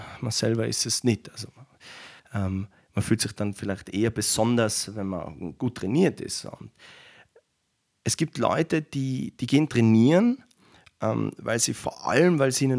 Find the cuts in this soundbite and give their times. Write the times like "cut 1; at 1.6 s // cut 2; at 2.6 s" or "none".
cut 1; at 2.2 s